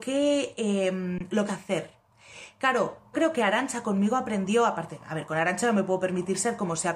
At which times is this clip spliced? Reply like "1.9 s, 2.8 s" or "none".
1.5 s, 3.1 s